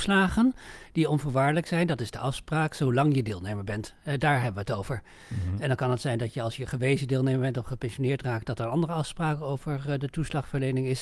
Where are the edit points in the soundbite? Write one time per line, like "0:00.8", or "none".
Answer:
none